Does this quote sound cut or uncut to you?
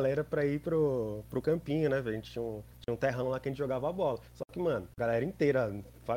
cut